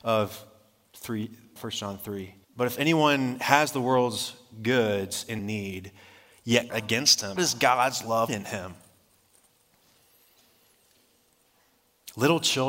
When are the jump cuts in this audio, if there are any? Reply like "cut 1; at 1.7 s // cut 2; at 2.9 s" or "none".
cut 1; at 1.6 s // cut 2; at 2.4 s // cut 3; at 5.4 s // cut 4; at 6.7 s // cut 5; at 7.4 s // cut 6; at 8.3 s